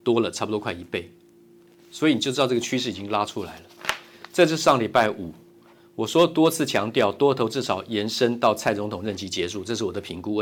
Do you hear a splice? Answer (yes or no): no